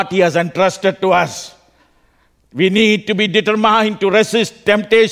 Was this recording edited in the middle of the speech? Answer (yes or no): no